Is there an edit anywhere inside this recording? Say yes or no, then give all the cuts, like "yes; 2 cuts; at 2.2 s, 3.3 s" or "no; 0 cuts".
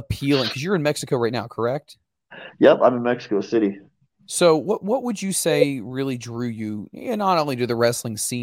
no; 0 cuts